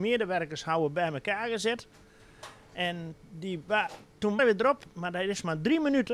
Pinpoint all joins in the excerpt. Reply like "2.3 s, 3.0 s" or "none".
3.2 s, 4.4 s